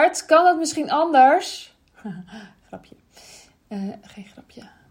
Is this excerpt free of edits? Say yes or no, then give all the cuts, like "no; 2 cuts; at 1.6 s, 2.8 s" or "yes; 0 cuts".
yes; 0 cuts